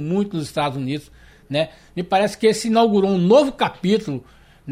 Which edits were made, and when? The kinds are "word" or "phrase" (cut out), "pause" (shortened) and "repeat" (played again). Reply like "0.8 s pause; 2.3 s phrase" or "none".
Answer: none